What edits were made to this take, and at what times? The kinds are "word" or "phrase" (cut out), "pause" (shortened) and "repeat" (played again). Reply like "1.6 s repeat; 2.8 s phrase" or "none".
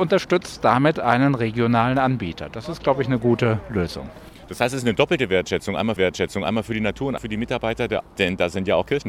6.0 s repeat; 7.2 s word; 8.0 s word